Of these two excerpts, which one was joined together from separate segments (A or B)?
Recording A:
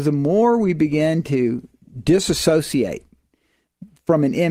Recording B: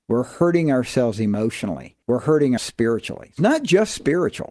B